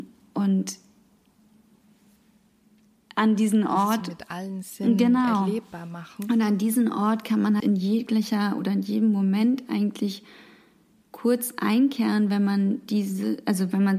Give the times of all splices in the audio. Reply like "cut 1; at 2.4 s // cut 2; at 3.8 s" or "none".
cut 1; at 7.6 s